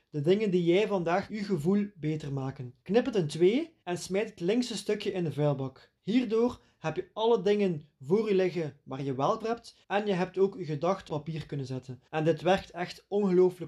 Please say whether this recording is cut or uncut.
cut